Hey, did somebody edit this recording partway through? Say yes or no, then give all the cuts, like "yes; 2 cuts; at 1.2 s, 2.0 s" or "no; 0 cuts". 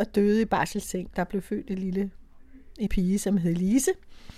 yes; 2 cuts; at 1.1 s, 2.9 s